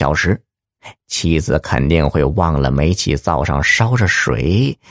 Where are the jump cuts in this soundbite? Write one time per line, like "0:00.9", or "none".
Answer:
0:01.0